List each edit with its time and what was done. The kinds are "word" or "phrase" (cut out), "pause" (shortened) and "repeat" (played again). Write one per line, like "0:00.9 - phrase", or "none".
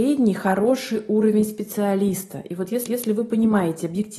0:02.9 - repeat